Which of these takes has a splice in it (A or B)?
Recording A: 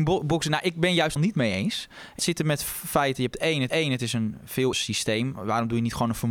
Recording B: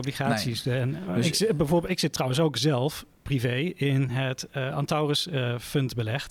A